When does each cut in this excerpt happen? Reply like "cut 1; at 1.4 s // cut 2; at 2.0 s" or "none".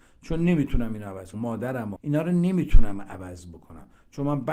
cut 1; at 1.3 s // cut 2; at 2.0 s